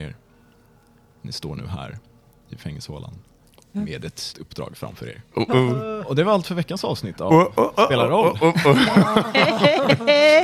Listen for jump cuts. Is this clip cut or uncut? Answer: cut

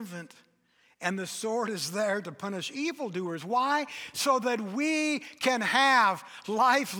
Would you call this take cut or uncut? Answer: uncut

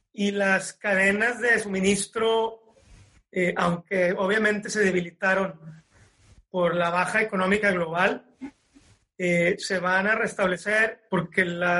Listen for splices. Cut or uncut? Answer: uncut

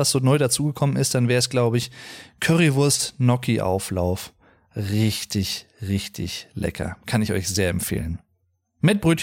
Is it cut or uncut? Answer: uncut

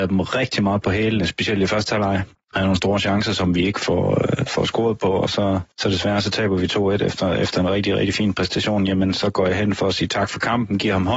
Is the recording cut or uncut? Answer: cut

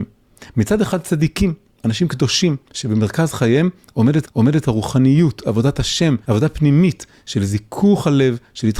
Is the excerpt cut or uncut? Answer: cut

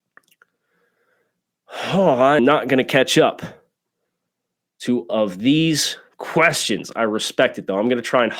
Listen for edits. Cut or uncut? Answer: cut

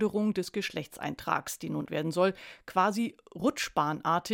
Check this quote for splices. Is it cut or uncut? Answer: cut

